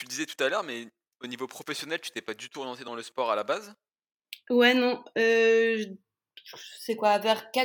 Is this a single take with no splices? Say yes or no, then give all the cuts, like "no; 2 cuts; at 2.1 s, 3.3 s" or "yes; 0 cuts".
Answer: yes; 0 cuts